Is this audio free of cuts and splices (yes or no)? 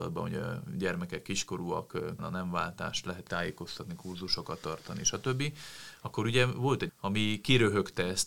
no